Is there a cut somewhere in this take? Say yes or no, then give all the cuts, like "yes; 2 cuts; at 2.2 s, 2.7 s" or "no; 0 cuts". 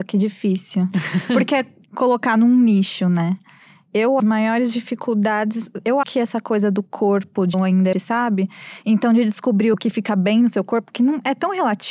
yes; 5 cuts; at 4.2 s, 6.0 s, 7.5 s, 7.9 s, 9.7 s